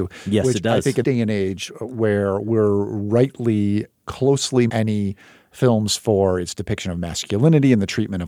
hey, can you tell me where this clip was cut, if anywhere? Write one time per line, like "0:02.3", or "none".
0:01.0
0:04.7

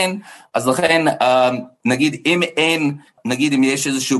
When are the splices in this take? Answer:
0:03.2

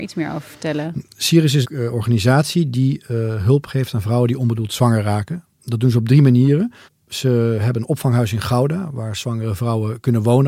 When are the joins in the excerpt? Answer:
0:01.6
0:05.5
0:06.9

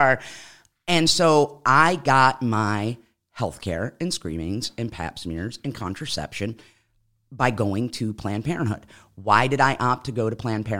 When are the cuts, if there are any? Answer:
none

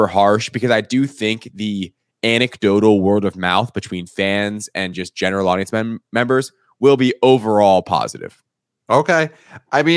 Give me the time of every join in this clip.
none

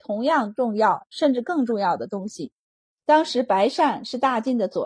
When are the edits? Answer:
none

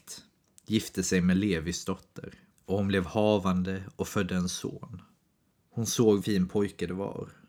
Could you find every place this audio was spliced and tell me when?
0:06.2

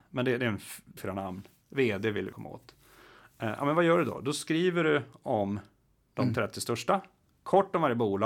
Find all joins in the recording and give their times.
0:01.0
0:02.3

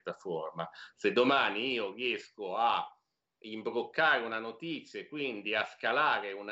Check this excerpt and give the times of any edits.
none

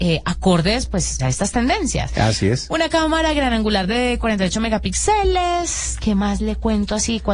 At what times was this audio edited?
0:01.2

